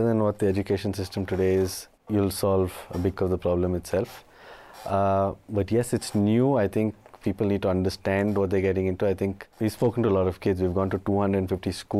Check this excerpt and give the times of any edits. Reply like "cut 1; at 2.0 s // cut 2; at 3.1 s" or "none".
cut 1; at 2.0 s // cut 2; at 3.2 s // cut 3; at 9.5 s